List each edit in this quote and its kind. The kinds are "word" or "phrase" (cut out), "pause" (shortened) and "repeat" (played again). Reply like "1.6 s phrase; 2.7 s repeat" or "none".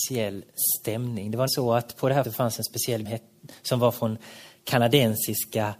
1.5 s word; 2.2 s word; 3.0 s phrase